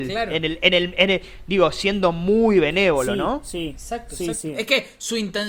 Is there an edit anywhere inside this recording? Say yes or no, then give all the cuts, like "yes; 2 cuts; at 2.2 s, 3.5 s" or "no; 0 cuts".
no; 0 cuts